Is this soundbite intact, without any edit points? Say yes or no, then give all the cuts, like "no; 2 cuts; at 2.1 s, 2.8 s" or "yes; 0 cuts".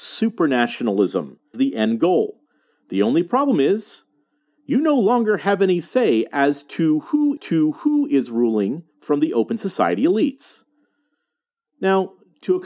no; 3 cuts; at 1.5 s, 7.4 s, 8.9 s